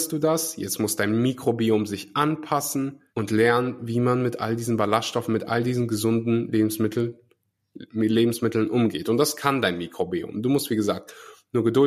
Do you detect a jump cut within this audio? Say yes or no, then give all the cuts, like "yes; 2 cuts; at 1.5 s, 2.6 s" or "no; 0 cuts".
yes; 1 cut; at 3.1 s